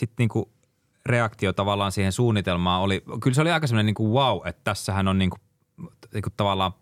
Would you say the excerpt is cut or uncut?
uncut